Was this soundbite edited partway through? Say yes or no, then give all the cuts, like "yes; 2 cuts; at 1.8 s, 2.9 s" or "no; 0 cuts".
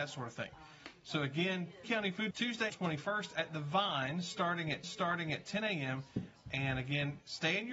yes; 4 cuts; at 1.8 s, 2.3 s, 2.7 s, 4.8 s